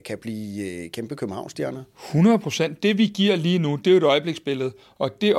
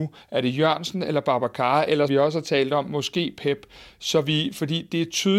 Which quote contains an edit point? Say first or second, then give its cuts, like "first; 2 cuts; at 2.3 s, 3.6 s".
second; 1 cut; at 2.1 s